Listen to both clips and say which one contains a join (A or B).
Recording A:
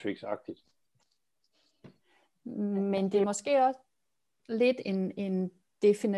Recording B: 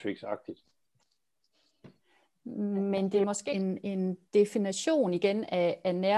B